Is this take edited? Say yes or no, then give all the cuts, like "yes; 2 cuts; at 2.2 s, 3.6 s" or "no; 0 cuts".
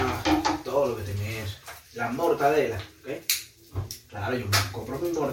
yes; 2 cuts; at 1.9 s, 4.0 s